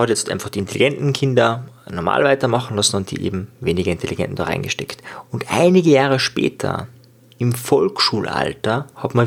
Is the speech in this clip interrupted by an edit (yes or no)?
no